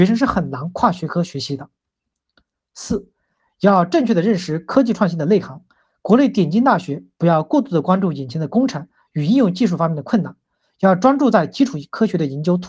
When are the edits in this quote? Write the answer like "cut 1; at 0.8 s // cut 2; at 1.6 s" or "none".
none